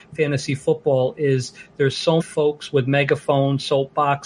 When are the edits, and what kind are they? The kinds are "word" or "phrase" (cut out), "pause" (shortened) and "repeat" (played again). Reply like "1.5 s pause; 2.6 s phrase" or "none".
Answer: 2.2 s word